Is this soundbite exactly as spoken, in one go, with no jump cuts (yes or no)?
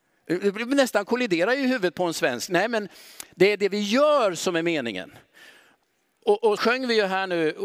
no